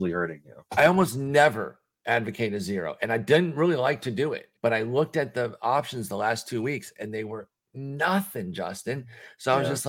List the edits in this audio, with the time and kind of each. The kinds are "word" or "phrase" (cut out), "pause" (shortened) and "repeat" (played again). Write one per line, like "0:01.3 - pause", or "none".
0:04.6 - pause